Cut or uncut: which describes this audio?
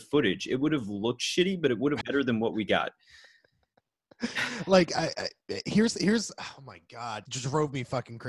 cut